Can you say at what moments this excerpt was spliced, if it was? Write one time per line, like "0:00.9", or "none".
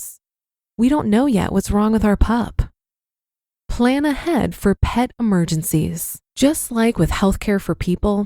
0:06.3